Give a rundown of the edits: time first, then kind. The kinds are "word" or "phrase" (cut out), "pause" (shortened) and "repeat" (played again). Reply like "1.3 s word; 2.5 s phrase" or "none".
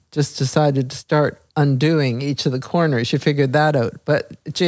1.5 s pause